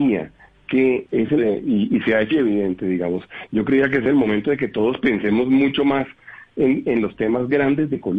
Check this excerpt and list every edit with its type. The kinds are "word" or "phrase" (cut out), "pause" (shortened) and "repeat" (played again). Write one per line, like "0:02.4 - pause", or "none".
0:01.1 - word
0:01.4 - word
0:02.3 - word